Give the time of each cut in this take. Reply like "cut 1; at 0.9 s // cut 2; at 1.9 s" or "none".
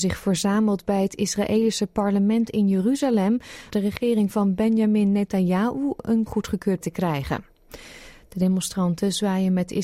cut 1; at 3.7 s // cut 2; at 6.3 s // cut 3; at 6.8 s

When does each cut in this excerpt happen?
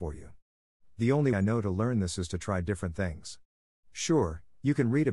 cut 1; at 1.3 s

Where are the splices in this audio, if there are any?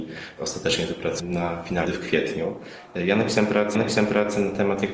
cut 1; at 1.2 s // cut 2; at 1.8 s // cut 3; at 3.7 s

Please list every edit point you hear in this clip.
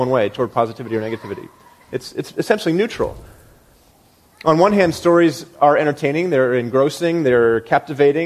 none

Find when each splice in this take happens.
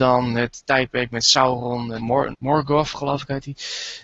cut 1; at 2.0 s // cut 2; at 2.3 s

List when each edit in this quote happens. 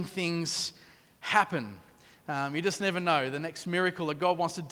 none

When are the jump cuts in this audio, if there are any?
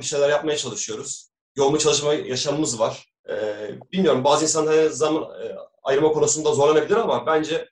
cut 1; at 3.2 s

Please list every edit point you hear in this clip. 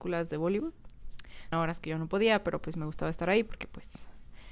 cut 1; at 1.5 s

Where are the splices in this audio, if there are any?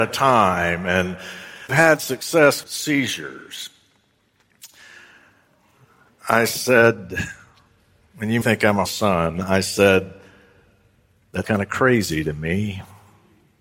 cut 1; at 1.7 s // cut 2; at 2.6 s // cut 3; at 8.4 s // cut 4; at 8.8 s // cut 5; at 11.4 s

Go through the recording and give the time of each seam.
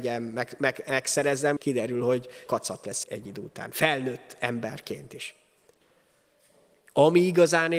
cut 1; at 1.6 s // cut 2; at 2.5 s // cut 3; at 3.0 s

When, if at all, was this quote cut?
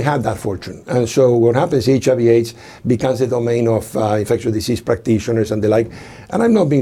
none

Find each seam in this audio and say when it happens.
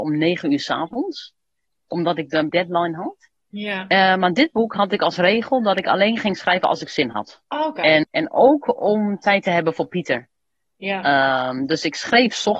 cut 1; at 2.5 s // cut 2; at 7.4 s // cut 3; at 8.0 s

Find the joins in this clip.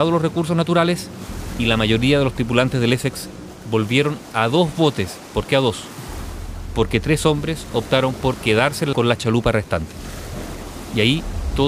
cut 1; at 8.9 s

